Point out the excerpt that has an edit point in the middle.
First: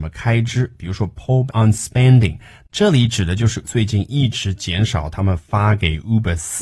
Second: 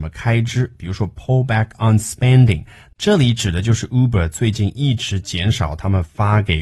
first; 2 cuts; at 1.5 s, 3.6 s

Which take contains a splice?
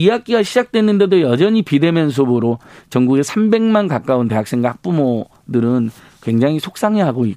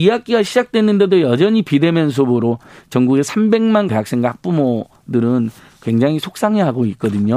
second; 1 cut; at 3.9 s

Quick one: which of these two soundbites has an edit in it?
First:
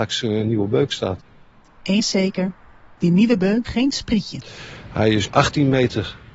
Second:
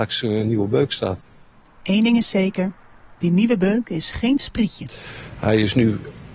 first; 3 cuts; at 2.0 s, 3.6 s, 5.3 s

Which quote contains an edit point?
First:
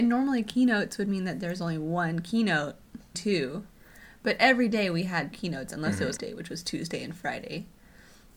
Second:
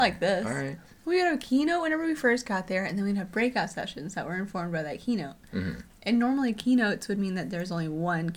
first; 3 cuts; at 3.1 s, 5.3 s, 6.2 s

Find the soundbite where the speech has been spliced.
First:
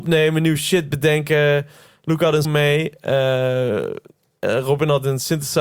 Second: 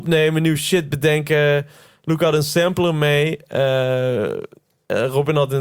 first; 1 cut; at 2.4 s

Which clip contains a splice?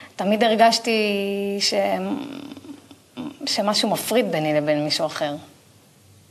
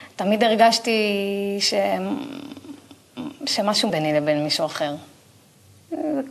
second; 1 cut; at 3.9 s

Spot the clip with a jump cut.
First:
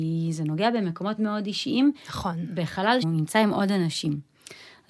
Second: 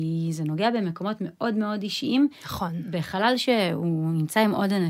first; 2 cuts; at 1.2 s, 3.0 s

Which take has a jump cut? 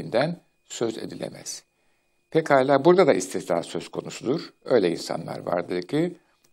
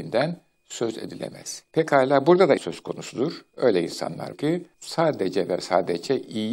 second; 4 cuts; at 1.7 s, 2.6 s, 4.3 s, 4.7 s

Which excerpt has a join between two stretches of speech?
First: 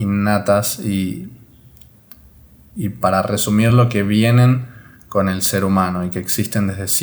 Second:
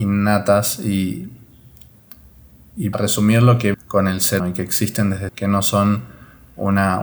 second; 4 cuts; at 2.9 s, 3.7 s, 4.4 s, 5.3 s

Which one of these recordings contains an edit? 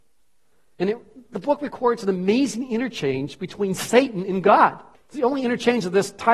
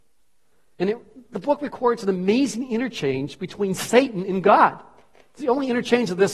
first; 1 cut; at 4.9 s

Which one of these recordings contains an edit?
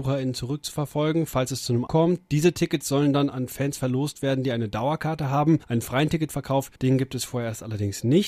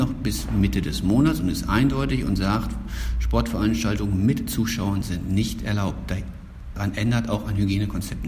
first; 3 cuts; at 1.9 s, 5.6 s, 6.7 s

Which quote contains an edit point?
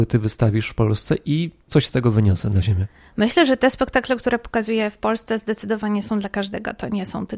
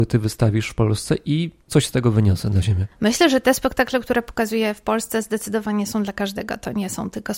second; 1 cut; at 2.9 s

